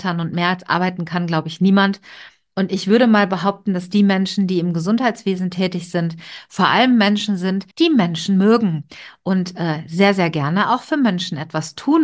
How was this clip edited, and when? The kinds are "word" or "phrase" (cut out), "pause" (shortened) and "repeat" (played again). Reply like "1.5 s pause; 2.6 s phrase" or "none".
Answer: 7.7 s pause